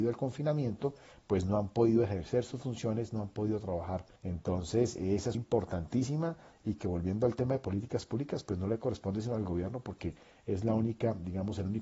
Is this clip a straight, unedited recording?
no; 2 cuts; at 4.2 s, 5.3 s

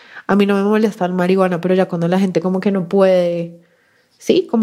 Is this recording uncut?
yes; 0 cuts

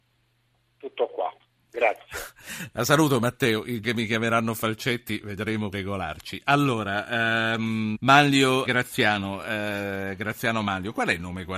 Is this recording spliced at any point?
yes; 4 cuts; at 3.8 s, 5.7 s, 7.9 s, 8.7 s

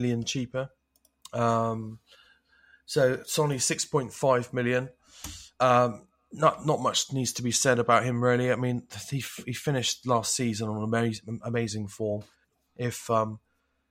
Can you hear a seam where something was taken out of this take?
no; 0 cuts

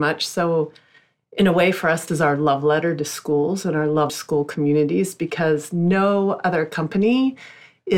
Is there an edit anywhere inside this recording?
yes; 2 cuts; at 2.1 s, 4.1 s

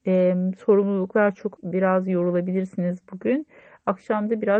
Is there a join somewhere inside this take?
yes; 1 cut; at 1.6 s

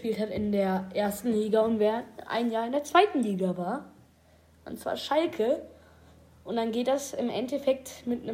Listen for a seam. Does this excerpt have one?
no; 0 cuts

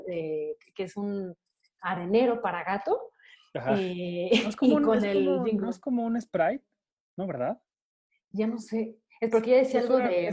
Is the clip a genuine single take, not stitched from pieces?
yes; 0 cuts

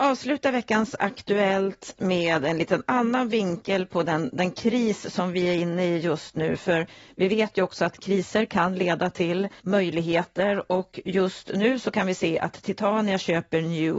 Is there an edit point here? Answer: yes; 1 cut; at 9.6 s

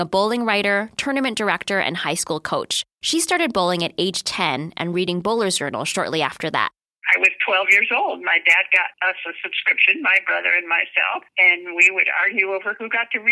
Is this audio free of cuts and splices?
no; 3 cuts; at 2.9 s, 8.9 s, 11.3 s

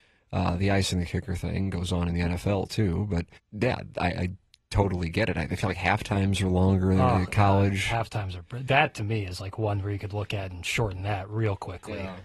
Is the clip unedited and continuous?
no; 2 cuts; at 3.4 s, 8.7 s

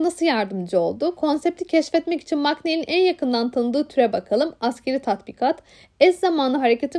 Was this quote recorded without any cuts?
yes; 0 cuts

